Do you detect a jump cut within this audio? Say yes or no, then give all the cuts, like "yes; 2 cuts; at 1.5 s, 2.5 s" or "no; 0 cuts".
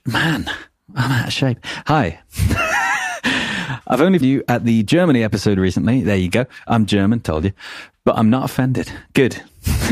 yes; 1 cut; at 4.2 s